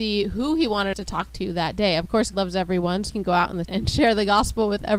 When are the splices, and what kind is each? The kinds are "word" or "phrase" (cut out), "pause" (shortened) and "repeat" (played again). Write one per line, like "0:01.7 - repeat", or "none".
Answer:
0:00.9 - word
0:02.3 - word
0:03.1 - word
0:03.6 - word